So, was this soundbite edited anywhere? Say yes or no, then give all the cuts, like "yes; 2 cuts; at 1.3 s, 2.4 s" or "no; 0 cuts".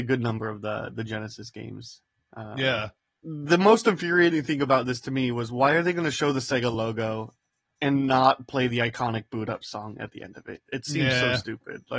no; 0 cuts